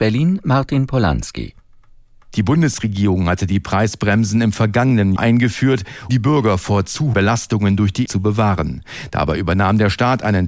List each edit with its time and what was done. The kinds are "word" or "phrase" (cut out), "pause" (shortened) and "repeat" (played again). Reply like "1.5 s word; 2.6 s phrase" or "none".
5.2 s word; 6.1 s word; 7.1 s word; 8.1 s word